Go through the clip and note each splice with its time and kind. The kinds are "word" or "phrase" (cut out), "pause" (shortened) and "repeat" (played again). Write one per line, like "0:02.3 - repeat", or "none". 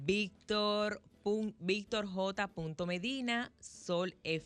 none